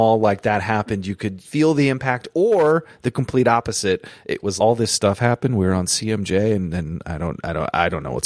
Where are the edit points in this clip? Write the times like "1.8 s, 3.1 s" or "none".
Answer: 1.4 s, 4.6 s